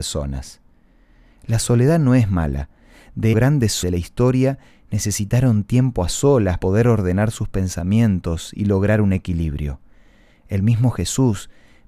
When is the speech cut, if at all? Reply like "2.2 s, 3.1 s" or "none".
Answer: 3.3 s, 3.8 s, 6.6 s